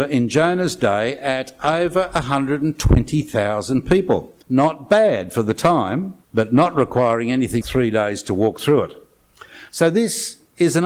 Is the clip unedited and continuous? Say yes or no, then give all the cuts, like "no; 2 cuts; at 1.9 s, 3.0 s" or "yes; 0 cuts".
no; 3 cuts; at 4.4 s, 6.2 s, 7.6 s